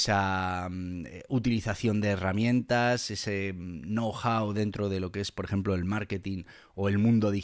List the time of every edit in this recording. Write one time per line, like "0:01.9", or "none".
none